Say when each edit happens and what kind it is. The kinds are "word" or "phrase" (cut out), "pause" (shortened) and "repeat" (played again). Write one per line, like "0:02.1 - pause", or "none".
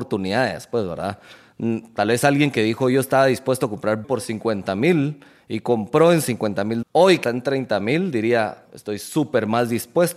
0:04.0 - word
0:06.8 - word
0:07.2 - word
0:08.7 - word